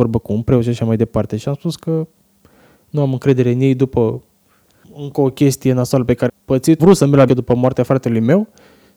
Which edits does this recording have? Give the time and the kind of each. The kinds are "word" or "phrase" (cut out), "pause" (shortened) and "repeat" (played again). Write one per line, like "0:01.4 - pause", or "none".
0:04.8 - word
0:06.3 - word
0:06.8 - word
0:07.3 - word

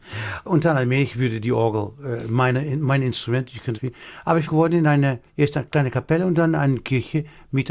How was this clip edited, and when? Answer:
0:03.7 - word
0:04.4 - phrase
0:05.3 - pause

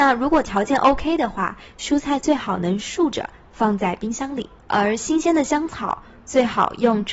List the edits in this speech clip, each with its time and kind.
0:04.6 - pause

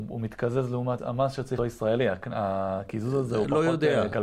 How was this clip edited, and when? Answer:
0:01.0 - word
0:01.6 - phrase

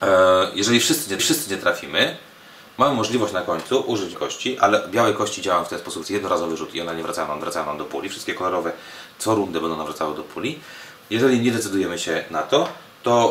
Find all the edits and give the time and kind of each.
0:01.2 - repeat
0:04.1 - word
0:06.0 - phrase
0:07.4 - repeat

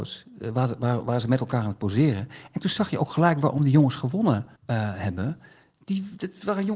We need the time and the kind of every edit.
0:04.6 - pause

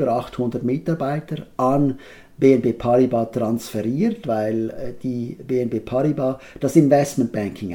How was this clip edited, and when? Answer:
none

